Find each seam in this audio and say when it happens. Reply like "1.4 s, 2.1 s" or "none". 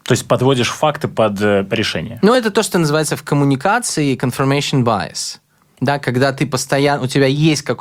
none